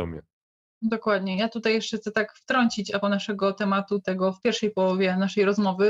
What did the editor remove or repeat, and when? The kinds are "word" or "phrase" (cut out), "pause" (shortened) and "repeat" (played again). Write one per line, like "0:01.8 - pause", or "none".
0:03.0 - word